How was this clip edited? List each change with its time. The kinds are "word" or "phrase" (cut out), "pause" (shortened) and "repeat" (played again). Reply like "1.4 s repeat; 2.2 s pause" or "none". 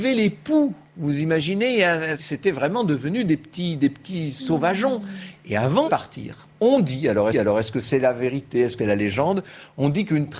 2.2 s word; 5.8 s word; 7.3 s repeat; 8.8 s word